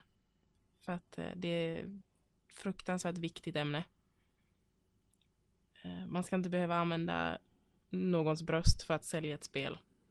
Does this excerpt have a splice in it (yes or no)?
no